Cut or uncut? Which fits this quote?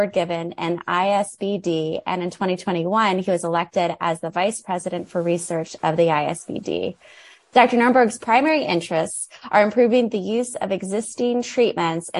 uncut